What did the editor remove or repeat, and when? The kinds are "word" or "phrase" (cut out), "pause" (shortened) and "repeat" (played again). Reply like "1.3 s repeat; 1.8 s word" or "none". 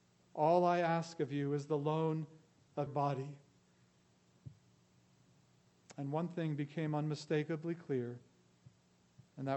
2.9 s word